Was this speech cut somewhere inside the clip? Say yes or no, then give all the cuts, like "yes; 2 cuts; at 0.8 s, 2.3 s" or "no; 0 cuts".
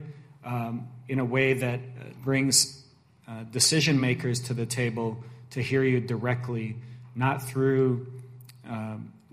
no; 0 cuts